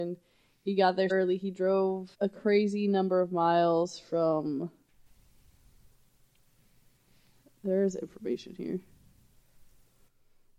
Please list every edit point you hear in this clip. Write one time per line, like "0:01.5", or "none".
0:01.1
0:02.1